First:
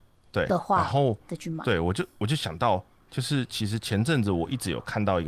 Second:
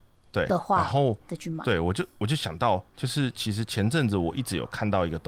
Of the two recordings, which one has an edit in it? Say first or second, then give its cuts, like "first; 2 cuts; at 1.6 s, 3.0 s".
second; 1 cut; at 2.9 s